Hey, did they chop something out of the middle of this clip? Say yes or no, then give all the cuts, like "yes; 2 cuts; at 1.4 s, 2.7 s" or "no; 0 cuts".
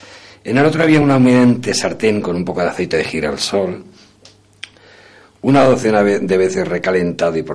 no; 0 cuts